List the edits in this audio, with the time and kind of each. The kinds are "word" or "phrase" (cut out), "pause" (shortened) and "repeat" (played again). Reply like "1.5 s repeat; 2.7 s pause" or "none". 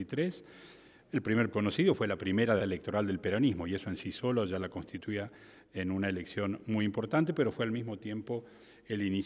1.5 s phrase; 2.6 s word

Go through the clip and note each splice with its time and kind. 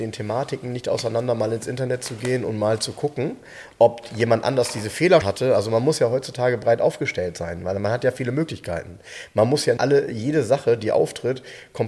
5.2 s word; 9.8 s word

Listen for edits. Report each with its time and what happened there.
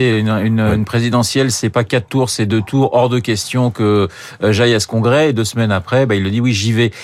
none

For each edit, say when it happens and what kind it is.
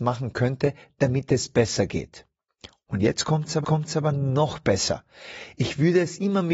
3.6 s repeat

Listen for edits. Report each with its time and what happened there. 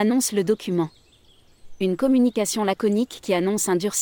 none

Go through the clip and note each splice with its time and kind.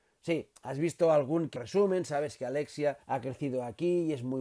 1.6 s word; 3.0 s pause

